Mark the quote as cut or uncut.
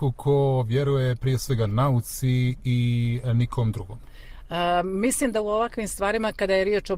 uncut